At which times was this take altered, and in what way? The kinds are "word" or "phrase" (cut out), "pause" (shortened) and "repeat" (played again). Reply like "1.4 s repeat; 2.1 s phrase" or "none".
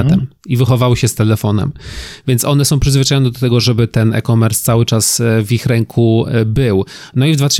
none